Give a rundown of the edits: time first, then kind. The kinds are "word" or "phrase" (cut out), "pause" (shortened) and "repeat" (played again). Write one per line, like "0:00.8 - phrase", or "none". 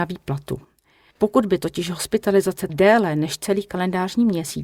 0:02.7 - word